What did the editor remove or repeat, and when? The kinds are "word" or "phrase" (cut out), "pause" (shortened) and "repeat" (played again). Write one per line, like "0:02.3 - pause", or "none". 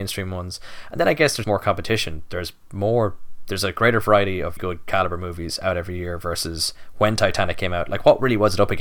0:01.4 - word
0:04.6 - word